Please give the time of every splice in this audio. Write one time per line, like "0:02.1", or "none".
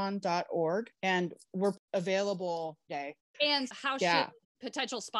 0:00.9
0:02.9
0:03.7

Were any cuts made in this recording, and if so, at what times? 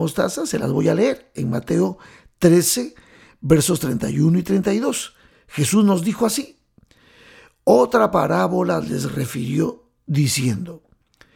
none

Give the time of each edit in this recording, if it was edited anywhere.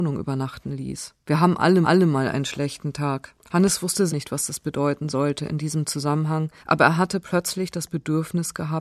0:01.2
0:01.8
0:03.4
0:04.1
0:06.6

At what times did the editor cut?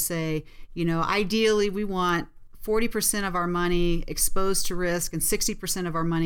none

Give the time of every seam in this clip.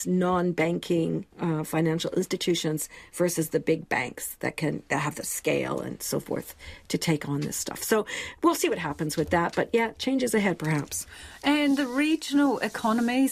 0:01.3

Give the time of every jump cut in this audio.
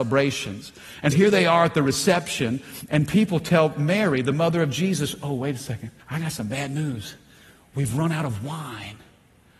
0:01.1
0:02.9
0:06.0

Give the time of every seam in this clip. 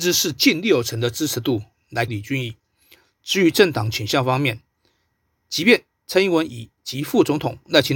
0:02.1

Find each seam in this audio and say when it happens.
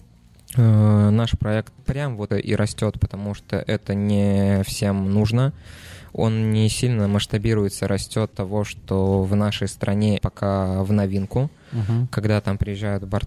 0:01.8
0:02.3
0:08.3
0:10.2

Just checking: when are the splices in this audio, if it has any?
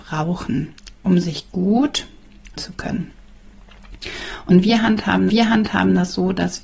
0:02.6
0:05.3

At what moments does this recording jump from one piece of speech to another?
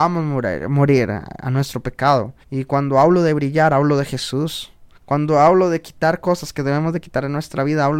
0:02.4
0:04.9

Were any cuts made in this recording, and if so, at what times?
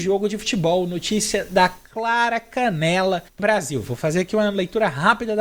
0:03.4

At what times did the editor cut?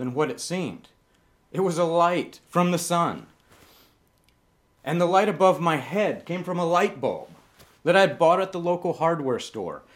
none

